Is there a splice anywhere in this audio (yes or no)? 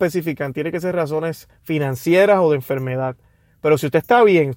no